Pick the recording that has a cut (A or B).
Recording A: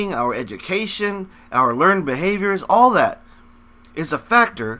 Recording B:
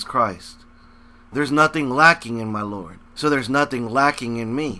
B